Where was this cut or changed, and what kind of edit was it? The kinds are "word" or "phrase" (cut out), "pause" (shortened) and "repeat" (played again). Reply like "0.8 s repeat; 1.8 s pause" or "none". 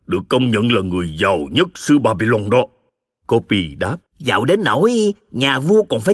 2.9 s pause; 4.1 s pause